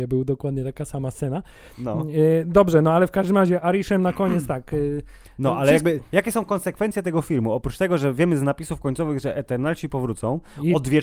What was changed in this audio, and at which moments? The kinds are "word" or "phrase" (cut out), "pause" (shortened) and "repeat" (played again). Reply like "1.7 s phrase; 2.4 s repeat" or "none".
none